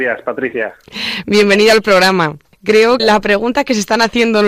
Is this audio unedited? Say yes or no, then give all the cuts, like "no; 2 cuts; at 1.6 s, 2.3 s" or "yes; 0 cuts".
no; 1 cut; at 3.0 s